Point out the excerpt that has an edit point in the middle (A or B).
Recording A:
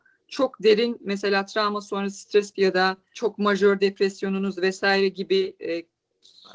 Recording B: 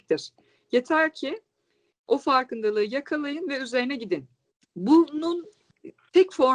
A